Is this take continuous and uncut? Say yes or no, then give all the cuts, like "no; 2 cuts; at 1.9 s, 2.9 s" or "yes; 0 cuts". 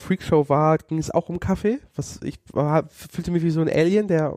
yes; 0 cuts